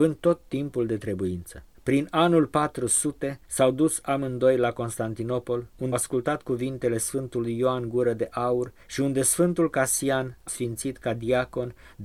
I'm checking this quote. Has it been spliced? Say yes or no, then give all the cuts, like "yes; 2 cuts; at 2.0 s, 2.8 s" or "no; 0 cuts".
yes; 5 cuts; at 1.7 s, 3.4 s, 5.9 s, 8.8 s, 10.5 s